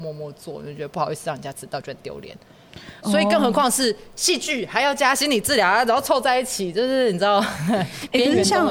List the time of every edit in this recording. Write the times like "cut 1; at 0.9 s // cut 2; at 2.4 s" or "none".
cut 1; at 3.0 s